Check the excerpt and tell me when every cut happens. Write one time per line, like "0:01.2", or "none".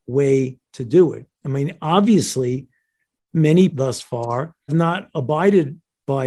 0:03.7
0:04.7